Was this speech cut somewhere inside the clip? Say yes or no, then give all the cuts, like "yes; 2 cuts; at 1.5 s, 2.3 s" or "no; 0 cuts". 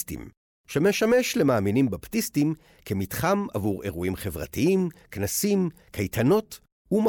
no; 0 cuts